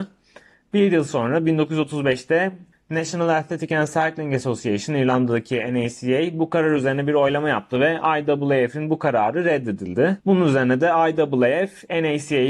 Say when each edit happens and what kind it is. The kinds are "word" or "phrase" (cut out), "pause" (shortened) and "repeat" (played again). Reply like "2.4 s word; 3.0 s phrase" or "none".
2.7 s pause; 10.2 s pause